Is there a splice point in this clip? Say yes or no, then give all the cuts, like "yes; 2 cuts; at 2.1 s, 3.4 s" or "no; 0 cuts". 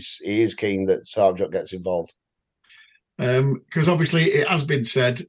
no; 0 cuts